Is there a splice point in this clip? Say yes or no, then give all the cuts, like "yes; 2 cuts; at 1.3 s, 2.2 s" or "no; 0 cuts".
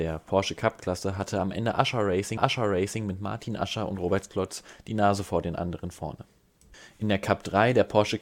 yes; 1 cut; at 2.4 s